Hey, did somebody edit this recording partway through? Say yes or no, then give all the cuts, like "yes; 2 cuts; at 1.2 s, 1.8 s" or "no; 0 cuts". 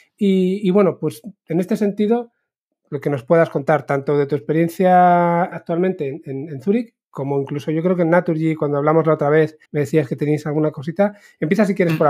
yes; 2 cuts; at 5.5 s, 9.6 s